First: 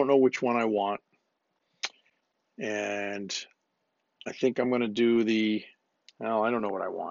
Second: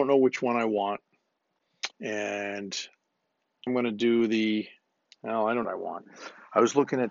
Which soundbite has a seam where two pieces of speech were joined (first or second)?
second